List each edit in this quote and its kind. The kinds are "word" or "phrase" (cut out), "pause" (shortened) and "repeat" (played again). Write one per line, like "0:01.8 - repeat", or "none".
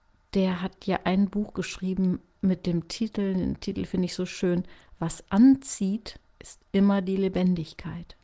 none